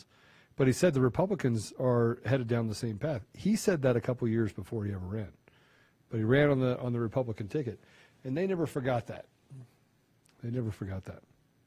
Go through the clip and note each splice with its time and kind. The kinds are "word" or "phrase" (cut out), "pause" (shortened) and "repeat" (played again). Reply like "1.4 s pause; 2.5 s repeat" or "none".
none

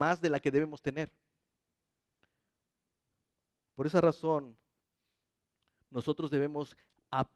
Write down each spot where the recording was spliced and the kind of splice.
none

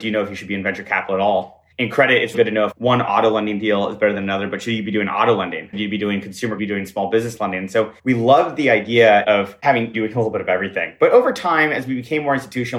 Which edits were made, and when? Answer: 1.7 s pause; 2.3 s word; 2.7 s word; 5.7 s phrase; 6.6 s phrase; 8.0 s pause; 9.2 s word; 9.9 s word

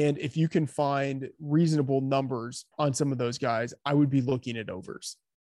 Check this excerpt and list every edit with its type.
2.7 s pause

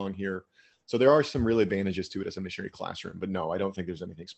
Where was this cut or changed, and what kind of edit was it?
none

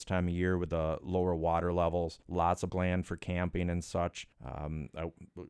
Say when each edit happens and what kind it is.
2.2 s pause; 2.7 s word; 4.3 s pause

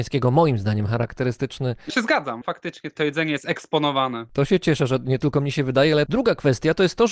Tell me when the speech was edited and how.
1.9 s word

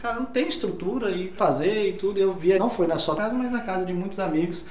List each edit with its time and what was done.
1.4 s word; 2.6 s word; 3.2 s word

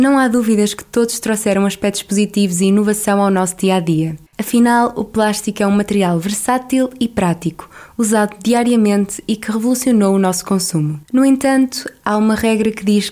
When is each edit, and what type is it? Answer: 4.3 s pause; 11.0 s pause

